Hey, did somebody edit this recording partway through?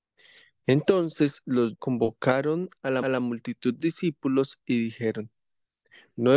yes; 3 cuts; at 1.7 s, 3.0 s, 3.8 s

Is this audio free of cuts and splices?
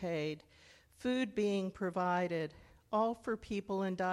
yes; 0 cuts

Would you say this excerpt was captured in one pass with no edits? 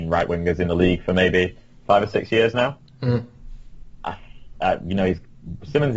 yes; 0 cuts

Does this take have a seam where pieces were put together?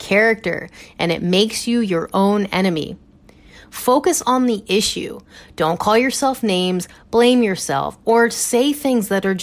no; 0 cuts

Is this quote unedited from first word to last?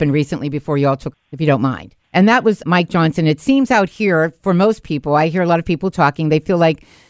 no; 3 cuts; at 1.1 s, 2.0 s, 2.6 s

